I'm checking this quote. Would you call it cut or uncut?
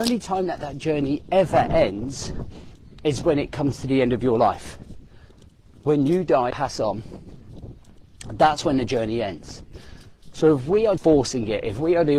cut